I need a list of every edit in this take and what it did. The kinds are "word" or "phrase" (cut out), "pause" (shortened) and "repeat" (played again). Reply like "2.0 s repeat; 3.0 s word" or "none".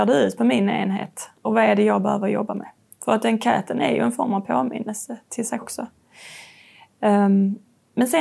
5.6 s word